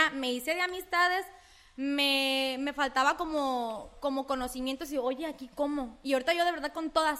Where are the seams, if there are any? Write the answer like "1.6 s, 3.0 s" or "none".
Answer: none